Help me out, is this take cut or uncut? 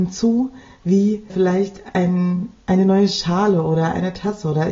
cut